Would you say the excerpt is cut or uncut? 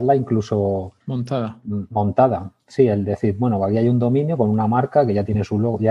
cut